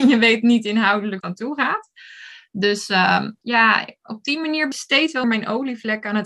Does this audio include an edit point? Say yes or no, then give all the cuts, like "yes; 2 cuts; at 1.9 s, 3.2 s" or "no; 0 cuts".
yes; 4 cuts; at 1.2 s, 3.4 s, 4.7 s, 5.2 s